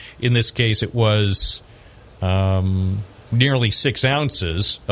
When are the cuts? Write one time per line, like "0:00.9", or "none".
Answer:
none